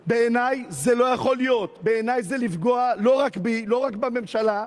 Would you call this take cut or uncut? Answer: uncut